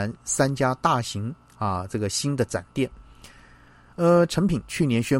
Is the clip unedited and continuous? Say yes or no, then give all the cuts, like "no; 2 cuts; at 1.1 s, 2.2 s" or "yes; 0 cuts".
yes; 0 cuts